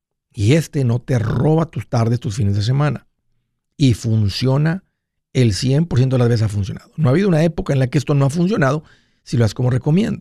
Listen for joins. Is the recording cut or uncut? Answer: uncut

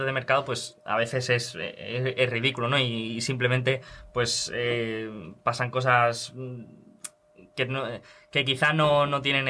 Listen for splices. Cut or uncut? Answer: uncut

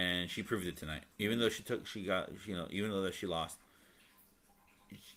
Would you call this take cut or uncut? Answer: cut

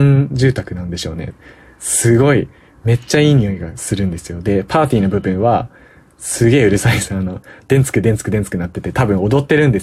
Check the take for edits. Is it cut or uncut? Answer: uncut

